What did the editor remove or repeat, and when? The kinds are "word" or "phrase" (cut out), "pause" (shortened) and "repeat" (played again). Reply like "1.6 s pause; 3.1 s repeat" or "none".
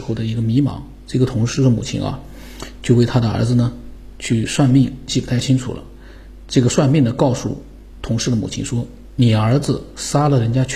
5.1 s phrase